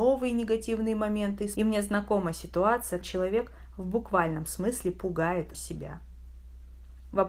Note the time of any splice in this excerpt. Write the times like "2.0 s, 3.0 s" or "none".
1.6 s, 3.0 s, 5.5 s